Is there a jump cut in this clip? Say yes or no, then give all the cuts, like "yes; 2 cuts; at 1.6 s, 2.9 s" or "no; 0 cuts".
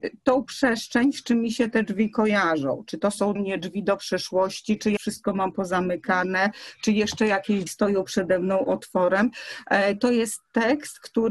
yes; 3 cuts; at 3.4 s, 5.0 s, 7.7 s